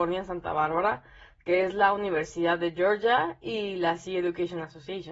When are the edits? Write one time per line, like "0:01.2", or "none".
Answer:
none